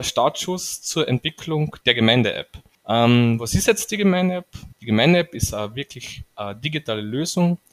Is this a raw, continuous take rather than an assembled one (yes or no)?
no